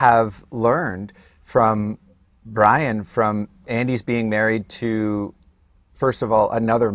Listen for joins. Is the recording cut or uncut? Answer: uncut